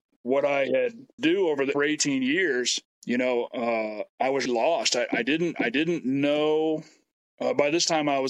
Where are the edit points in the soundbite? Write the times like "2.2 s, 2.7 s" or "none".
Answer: 1.2 s, 1.7 s, 2.9 s, 4.1 s, 4.5 s, 5.5 s